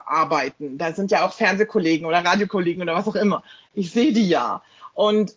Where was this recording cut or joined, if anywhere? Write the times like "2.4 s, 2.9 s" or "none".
none